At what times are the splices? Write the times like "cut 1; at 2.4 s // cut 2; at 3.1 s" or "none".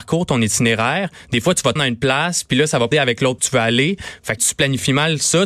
cut 1; at 1.8 s // cut 2; at 2.9 s // cut 3; at 3.4 s // cut 4; at 4.4 s